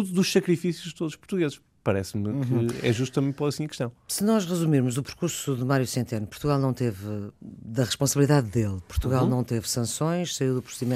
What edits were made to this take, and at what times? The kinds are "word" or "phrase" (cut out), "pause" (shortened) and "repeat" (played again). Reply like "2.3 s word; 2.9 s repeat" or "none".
none